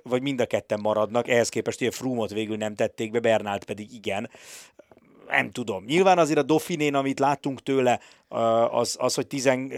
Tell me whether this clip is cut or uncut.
uncut